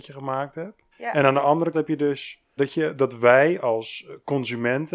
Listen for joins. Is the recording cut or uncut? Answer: cut